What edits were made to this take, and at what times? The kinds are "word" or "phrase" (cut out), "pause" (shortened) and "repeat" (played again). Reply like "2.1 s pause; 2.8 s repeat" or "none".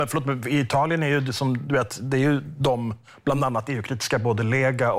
none